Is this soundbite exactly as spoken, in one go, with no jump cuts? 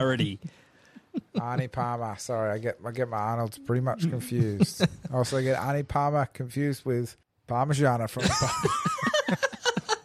yes; 0 cuts

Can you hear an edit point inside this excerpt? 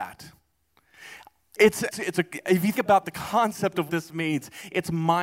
yes; 3 cuts; at 1.9 s, 2.7 s, 3.9 s

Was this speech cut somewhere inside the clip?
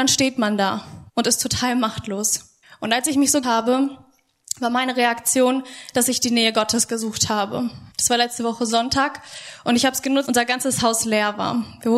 yes; 5 cuts; at 1.1 s, 2.6 s, 3.4 s, 7.9 s, 10.3 s

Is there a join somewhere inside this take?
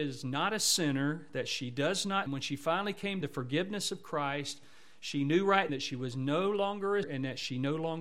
yes; 4 cuts; at 2.3 s, 3.2 s, 5.7 s, 7.0 s

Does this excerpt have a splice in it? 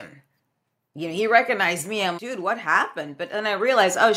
yes; 1 cut; at 2.2 s

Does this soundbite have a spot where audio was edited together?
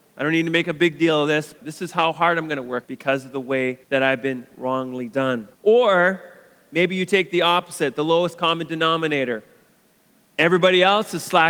yes; 4 cuts; at 1.6 s, 2.8 s, 3.8 s, 5.5 s

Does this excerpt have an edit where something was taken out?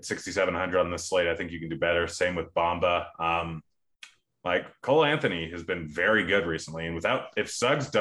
no; 0 cuts

